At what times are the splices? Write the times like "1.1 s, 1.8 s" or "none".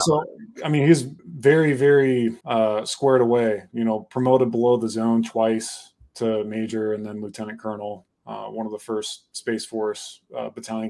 1.2 s, 2.4 s